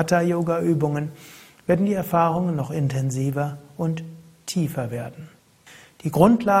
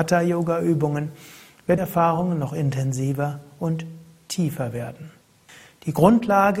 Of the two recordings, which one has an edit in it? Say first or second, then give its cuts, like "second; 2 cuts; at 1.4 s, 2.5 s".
second; 1 cut; at 1.8 s